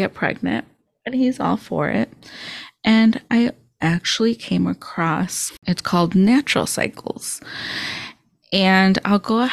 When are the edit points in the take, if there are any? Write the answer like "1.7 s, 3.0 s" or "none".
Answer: none